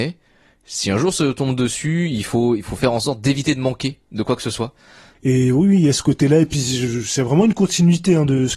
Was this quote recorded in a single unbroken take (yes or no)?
yes